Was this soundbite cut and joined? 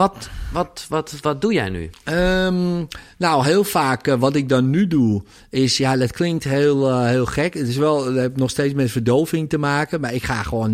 no; 0 cuts

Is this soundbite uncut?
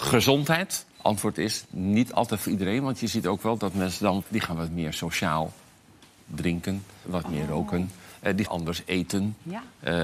no; 4 cuts; at 0.9 s, 4.2 s, 7.0 s, 8.4 s

